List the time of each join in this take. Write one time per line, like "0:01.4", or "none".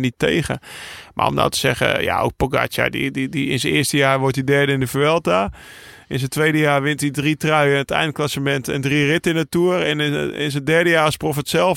none